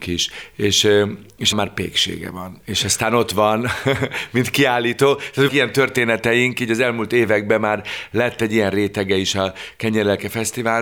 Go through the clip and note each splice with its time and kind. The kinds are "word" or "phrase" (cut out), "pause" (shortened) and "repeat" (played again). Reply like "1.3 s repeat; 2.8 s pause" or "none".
1.5 s word; 5.5 s word